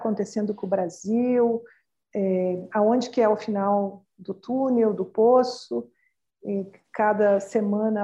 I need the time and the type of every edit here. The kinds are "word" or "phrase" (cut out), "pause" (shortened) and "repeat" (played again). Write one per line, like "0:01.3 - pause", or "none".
none